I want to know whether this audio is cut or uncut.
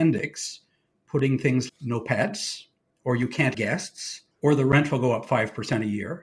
cut